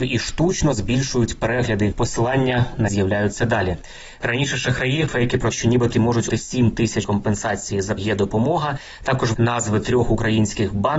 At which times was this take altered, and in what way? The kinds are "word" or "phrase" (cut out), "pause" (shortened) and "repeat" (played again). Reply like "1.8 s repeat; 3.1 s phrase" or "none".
1.9 s word; 2.9 s word; 5.1 s word; 5.5 s word; 5.9 s word; 6.3 s word; 7.0 s word; 8.0 s word; 9.3 s word